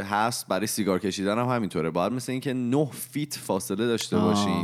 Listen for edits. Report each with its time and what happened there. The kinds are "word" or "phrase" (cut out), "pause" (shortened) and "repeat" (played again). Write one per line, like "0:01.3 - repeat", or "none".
none